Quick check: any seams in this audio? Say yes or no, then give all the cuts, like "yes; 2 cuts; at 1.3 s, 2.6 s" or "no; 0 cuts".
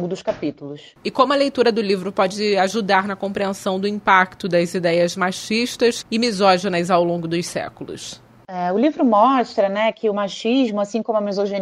no; 0 cuts